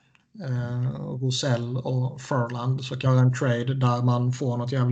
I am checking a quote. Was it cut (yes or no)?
yes